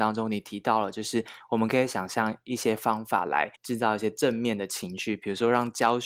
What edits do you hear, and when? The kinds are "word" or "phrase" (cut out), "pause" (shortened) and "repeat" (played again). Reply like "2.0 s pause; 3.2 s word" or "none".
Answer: 3.6 s pause